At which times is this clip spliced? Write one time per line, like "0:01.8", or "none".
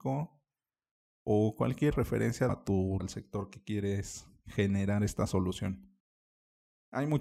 0:01.9
0:02.5
0:03.0